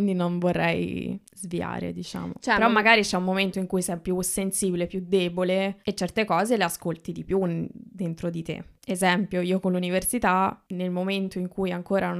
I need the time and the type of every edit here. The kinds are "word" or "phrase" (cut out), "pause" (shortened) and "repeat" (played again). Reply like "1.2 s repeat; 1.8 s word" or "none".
5.8 s pause